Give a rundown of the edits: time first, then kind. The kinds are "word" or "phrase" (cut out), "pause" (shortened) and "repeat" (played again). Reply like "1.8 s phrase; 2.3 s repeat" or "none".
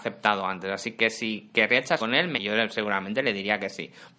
2.0 s phrase; 2.3 s word